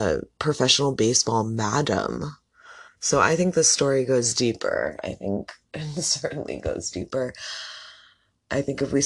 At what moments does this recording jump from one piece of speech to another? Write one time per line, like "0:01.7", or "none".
none